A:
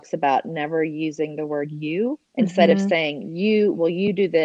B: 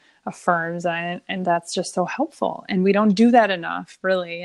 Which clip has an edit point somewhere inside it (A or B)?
A